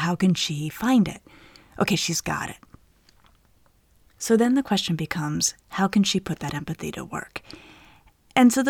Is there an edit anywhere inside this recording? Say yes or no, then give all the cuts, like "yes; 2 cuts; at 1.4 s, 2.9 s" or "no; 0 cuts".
no; 0 cuts